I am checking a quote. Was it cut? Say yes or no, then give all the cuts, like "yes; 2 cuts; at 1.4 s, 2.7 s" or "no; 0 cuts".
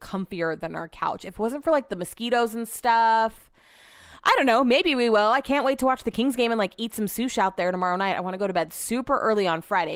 no; 0 cuts